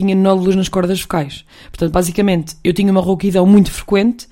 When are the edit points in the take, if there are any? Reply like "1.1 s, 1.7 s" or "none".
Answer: none